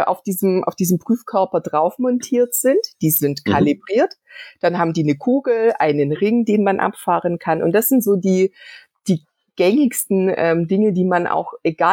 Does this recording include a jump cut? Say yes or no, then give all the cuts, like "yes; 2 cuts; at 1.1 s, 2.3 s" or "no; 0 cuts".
no; 0 cuts